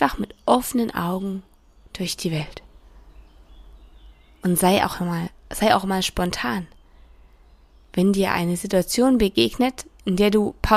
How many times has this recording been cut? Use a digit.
0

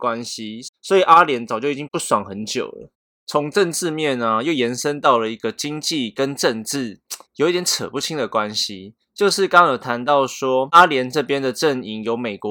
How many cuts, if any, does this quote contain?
2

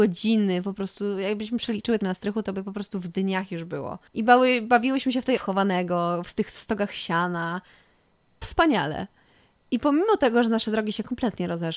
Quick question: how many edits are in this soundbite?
4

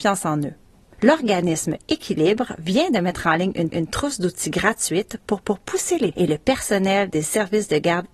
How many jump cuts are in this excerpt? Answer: 3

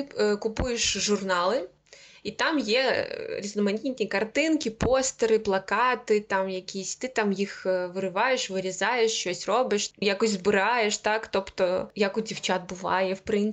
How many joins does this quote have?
1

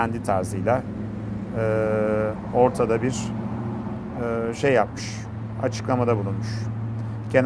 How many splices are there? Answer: 0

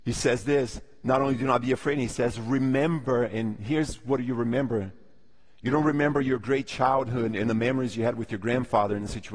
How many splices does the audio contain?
0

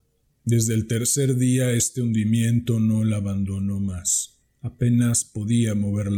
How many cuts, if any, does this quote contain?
1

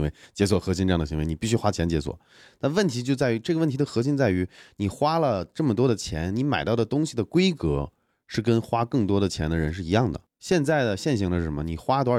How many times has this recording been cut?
0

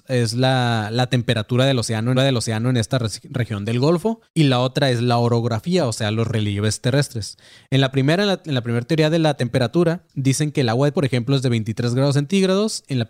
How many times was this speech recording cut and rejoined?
4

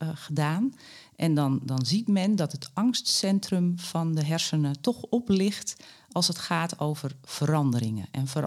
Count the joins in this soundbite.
0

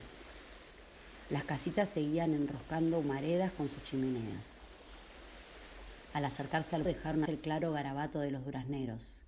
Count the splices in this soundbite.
2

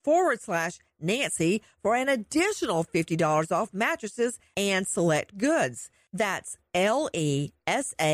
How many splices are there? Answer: 1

